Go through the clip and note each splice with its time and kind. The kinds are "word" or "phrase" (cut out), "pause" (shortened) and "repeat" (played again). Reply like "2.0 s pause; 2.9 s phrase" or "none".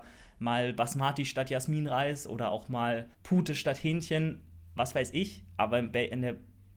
3.1 s pause

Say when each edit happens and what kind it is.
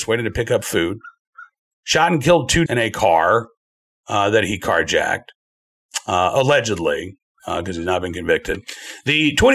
2.7 s word

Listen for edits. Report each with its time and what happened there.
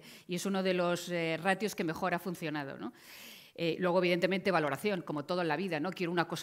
none

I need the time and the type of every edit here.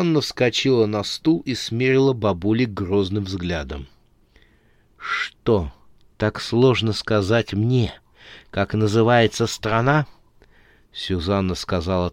none

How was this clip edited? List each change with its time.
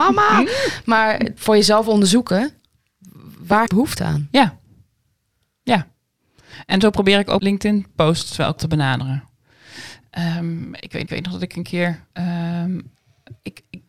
1.4 s word; 3.7 s phrase; 7.4 s word; 8.6 s word; 11.1 s repeat; 12.1 s pause

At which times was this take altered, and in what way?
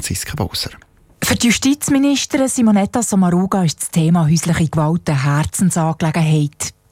none

